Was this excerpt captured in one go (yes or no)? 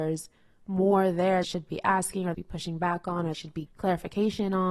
no